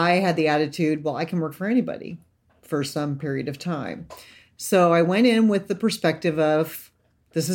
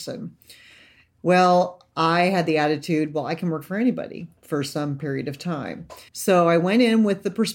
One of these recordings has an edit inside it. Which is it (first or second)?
second